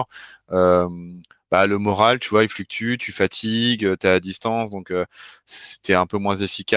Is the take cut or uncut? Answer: uncut